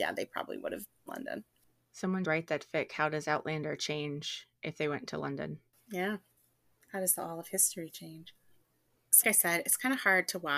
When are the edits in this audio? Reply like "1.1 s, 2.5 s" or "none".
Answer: 1.1 s, 2.2 s, 9.2 s